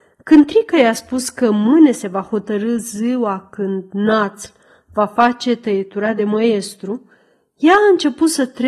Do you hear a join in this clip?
no; 0 cuts

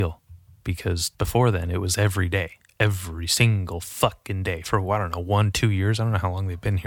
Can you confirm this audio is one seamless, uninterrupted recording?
no; 2 cuts; at 1.1 s, 2.7 s

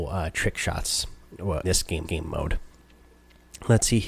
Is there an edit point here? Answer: yes; 2 cuts; at 1.6 s, 2.0 s

